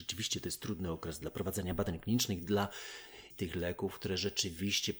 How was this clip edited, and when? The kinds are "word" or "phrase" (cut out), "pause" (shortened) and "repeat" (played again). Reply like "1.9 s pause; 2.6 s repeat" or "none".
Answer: 3.3 s word

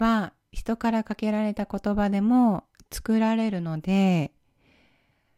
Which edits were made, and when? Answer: none

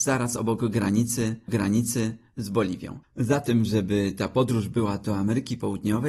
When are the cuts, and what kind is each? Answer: 1.5 s repeat

